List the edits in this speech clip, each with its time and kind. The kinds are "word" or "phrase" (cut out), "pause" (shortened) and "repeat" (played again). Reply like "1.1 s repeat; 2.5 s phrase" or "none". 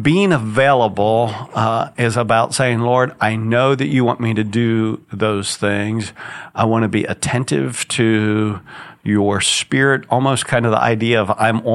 none